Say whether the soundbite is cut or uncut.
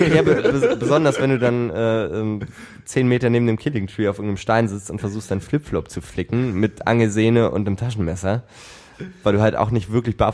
uncut